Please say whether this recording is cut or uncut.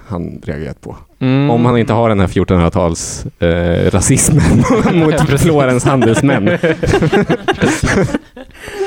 uncut